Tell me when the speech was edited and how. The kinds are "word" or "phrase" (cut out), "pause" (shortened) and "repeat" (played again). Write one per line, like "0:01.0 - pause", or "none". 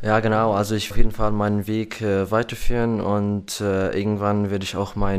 0:00.9 - word